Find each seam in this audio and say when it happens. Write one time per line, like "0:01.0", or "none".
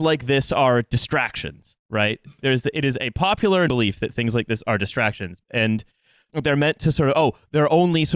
0:01.8
0:03.7
0:06.3